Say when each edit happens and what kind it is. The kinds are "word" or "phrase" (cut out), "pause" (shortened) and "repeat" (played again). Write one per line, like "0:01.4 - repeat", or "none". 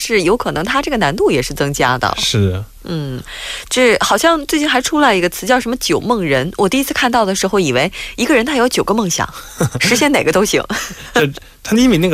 none